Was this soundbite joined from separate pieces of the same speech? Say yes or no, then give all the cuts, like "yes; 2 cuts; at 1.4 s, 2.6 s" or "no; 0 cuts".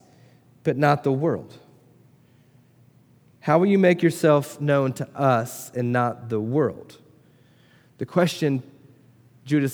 no; 0 cuts